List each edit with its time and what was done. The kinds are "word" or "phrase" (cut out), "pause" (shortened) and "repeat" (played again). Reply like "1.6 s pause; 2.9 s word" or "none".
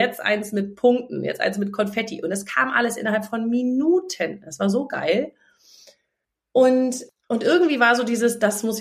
none